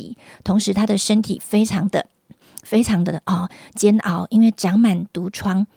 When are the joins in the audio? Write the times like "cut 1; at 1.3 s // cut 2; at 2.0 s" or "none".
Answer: none